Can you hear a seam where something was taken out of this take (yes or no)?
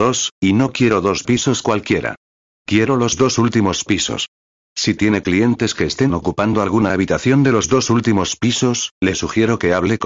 no